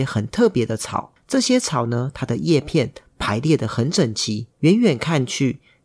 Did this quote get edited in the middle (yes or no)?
yes